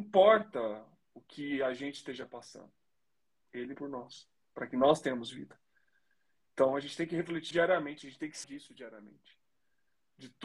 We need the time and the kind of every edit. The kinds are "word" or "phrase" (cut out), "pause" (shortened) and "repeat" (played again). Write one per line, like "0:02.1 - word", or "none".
0:03.7 - word
0:07.5 - word
0:08.4 - word